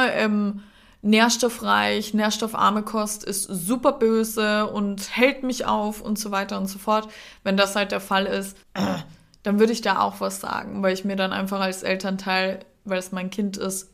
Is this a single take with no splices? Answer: no; 1 cut; at 8.6 s

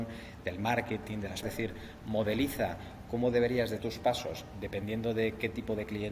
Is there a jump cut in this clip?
yes; 2 cuts; at 1.4 s, 3.8 s

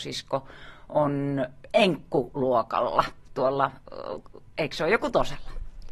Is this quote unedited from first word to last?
yes; 0 cuts

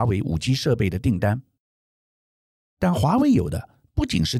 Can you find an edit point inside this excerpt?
no; 0 cuts

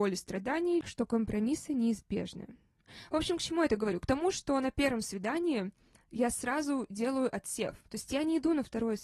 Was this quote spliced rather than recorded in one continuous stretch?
no; 0 cuts

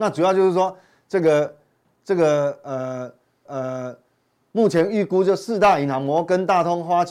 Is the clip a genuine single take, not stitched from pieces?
no; 1 cut; at 3.5 s

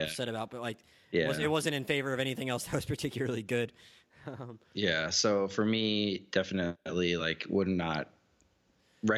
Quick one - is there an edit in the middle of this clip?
no; 0 cuts

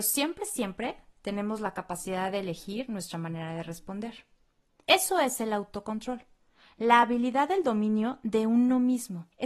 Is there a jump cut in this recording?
no; 0 cuts

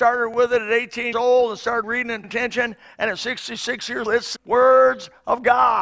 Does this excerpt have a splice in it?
yes; 5 cuts; at 1.1 s, 1.8 s, 2.2 s, 4.1 s, 4.4 s

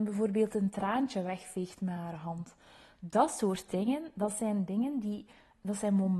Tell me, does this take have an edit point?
no; 0 cuts

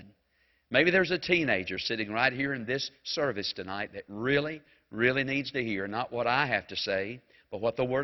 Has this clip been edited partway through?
no; 0 cuts

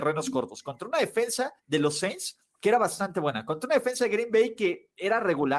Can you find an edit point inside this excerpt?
yes; 1 cut; at 1.6 s

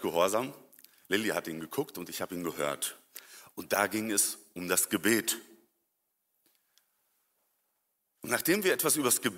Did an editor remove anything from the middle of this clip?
no; 0 cuts

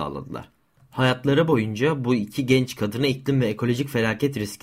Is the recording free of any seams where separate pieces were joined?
yes; 0 cuts

